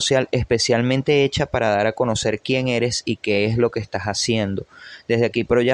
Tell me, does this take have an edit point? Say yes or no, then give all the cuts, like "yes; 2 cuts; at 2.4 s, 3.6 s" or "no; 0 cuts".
no; 0 cuts